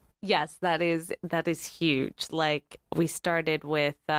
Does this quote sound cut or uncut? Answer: uncut